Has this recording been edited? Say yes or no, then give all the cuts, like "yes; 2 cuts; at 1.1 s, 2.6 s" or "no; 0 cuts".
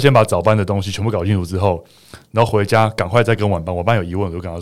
no; 0 cuts